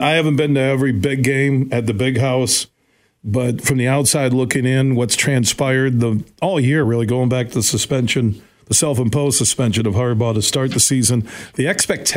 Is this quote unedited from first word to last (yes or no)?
yes